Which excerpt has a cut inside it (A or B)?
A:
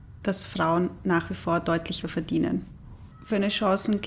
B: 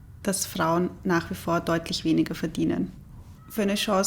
A